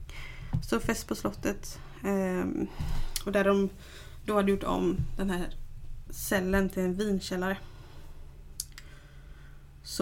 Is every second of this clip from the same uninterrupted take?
yes; 0 cuts

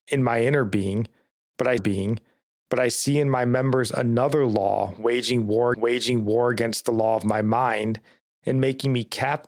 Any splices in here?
yes; 2 cuts; at 1.8 s, 5.7 s

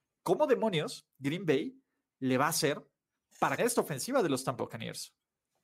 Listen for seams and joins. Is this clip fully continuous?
no; 2 cuts; at 3.6 s, 4.6 s

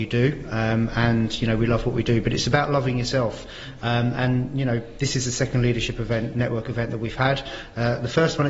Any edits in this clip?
no; 0 cuts

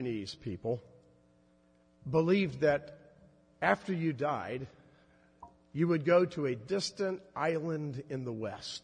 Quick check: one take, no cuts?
yes; 0 cuts

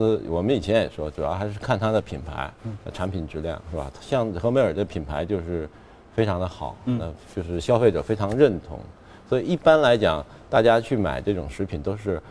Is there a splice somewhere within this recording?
no; 0 cuts

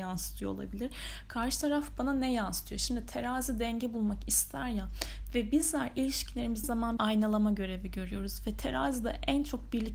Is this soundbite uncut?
no; 2 cuts; at 6.6 s, 7.0 s

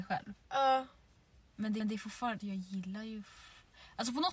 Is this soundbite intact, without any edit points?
no; 2 cuts; at 1.8 s, 2.4 s

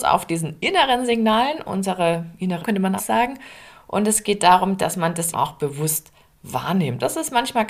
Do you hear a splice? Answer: yes; 3 cuts; at 2.6 s, 3.0 s, 5.3 s

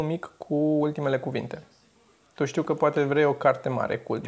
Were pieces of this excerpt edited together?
no; 0 cuts

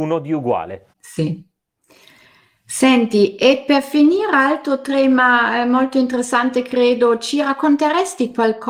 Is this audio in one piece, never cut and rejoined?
no; 1 cut; at 0.9 s

